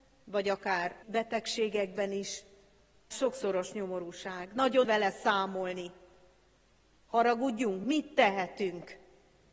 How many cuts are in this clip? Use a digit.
4